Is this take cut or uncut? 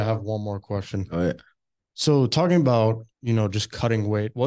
cut